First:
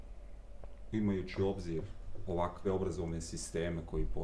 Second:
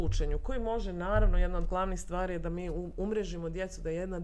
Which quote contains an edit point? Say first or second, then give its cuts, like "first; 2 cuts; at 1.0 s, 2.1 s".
first; 1 cut; at 2.6 s